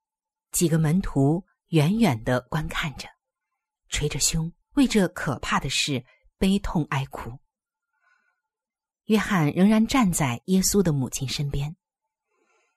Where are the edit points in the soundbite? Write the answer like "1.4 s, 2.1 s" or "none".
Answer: 4.6 s